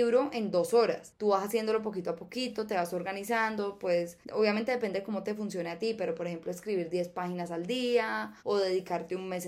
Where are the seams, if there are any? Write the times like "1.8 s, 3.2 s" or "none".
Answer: 4.2 s, 8.4 s